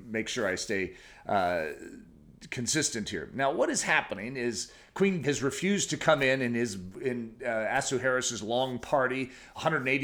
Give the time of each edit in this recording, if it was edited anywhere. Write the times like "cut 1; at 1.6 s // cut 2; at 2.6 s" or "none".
cut 1; at 5.2 s